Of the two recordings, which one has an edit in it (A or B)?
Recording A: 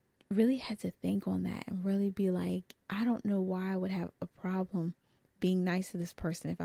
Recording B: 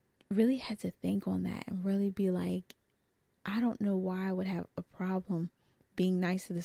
A